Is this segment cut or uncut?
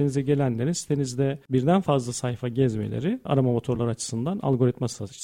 uncut